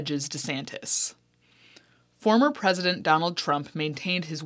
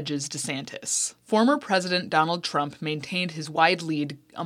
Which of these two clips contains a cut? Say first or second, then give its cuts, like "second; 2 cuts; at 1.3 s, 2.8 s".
second; 1 cut; at 1.2 s